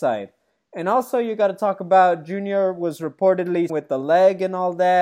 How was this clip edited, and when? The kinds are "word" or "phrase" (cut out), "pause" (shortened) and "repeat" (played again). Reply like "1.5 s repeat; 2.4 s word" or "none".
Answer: 3.7 s word